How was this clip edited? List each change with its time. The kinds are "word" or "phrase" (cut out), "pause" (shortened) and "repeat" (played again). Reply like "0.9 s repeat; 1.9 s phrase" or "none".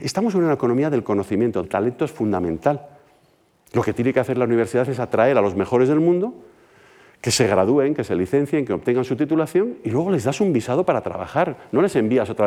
1.6 s word